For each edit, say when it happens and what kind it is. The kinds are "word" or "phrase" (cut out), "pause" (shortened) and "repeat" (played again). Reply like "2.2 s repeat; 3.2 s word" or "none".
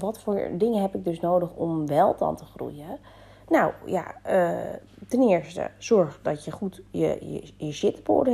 none